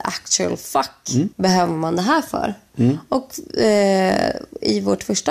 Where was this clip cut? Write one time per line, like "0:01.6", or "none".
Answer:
0:01.3